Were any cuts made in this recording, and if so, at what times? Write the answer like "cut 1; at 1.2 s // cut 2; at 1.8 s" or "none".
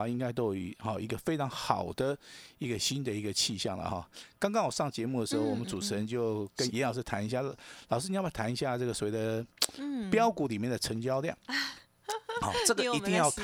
cut 1; at 6.7 s